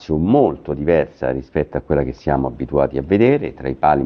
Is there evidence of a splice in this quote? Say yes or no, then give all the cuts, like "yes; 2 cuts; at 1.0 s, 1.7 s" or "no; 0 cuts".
no; 0 cuts